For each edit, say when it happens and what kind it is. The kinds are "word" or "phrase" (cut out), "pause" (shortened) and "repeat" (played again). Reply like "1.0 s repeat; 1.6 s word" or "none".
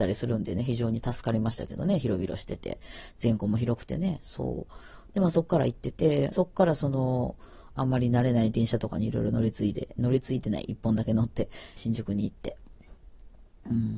6.3 s word; 11.8 s phrase